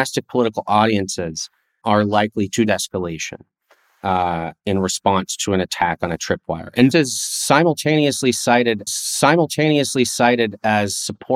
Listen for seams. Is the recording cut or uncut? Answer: cut